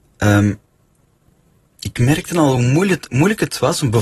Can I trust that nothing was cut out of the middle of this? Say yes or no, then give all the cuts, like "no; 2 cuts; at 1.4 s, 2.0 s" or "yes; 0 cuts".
yes; 0 cuts